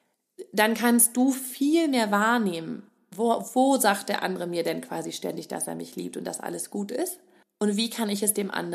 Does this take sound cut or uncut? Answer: cut